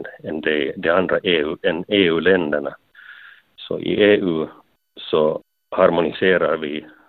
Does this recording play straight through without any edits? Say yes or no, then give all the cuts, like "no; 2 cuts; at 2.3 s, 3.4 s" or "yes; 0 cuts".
yes; 0 cuts